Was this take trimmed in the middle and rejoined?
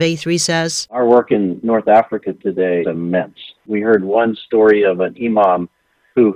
yes; 2 cuts; at 2.8 s, 3.6 s

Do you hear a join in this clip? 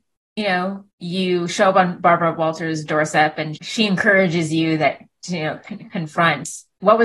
yes; 2 cuts; at 0.9 s, 3.6 s

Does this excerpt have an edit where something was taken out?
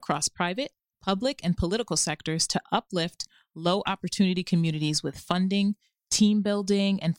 no; 0 cuts

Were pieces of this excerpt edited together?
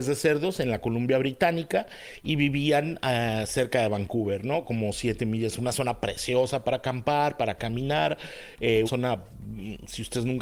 yes; 1 cut; at 8.9 s

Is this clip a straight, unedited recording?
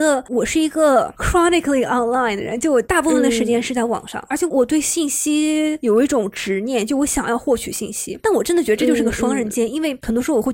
yes; 0 cuts

